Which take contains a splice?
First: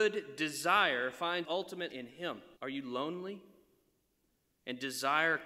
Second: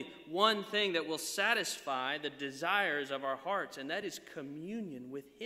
first; 3 cuts; at 1.4 s, 1.9 s, 2.6 s

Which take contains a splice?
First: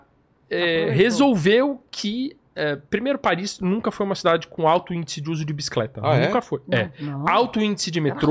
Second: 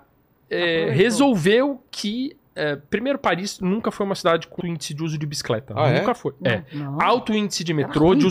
second; 1 cut; at 4.6 s

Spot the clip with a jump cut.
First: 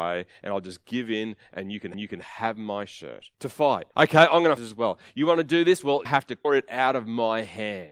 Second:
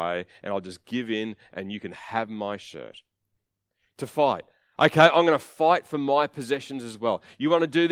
first; 6 cuts; at 1.9 s, 3.3 s, 3.9 s, 4.6 s, 6.1 s, 6.4 s

